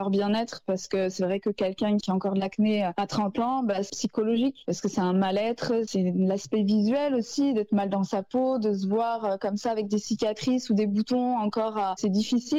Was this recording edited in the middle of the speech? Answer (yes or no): yes